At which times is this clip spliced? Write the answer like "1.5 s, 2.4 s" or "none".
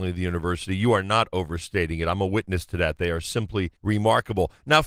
3.8 s

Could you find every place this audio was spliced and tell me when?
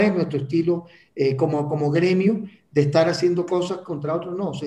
none

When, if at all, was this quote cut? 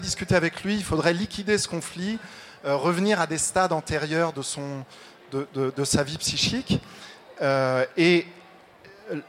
none

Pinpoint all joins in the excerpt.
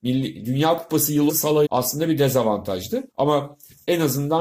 1.3 s, 1.7 s, 3.1 s

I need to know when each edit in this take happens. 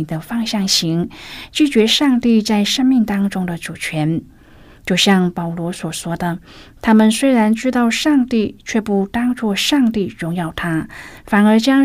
none

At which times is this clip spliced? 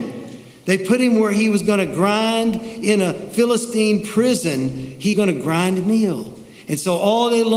5.1 s

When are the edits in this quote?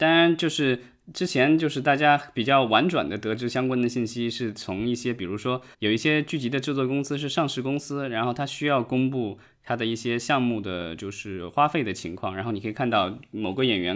5.7 s

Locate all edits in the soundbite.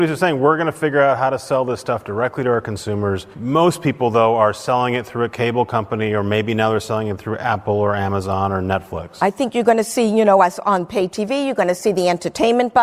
3.3 s

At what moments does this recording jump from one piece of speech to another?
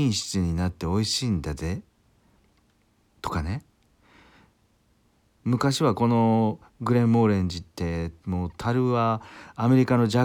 none

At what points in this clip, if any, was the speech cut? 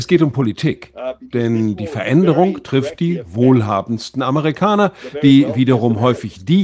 none

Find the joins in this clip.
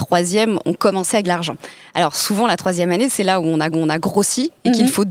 1.2 s, 3.7 s

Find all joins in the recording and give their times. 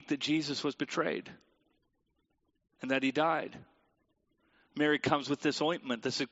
none

